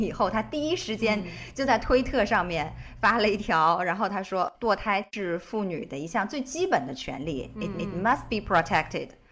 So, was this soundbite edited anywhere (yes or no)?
yes